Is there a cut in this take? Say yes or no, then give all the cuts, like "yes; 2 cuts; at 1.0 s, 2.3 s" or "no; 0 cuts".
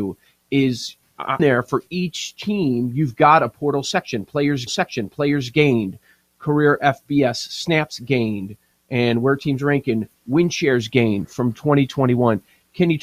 yes; 2 cuts; at 1.4 s, 4.7 s